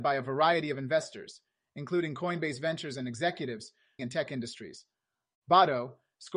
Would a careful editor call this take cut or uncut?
cut